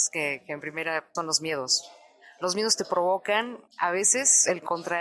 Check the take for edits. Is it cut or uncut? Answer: cut